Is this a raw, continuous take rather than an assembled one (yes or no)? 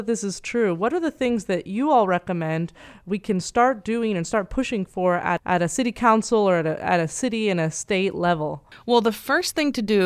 yes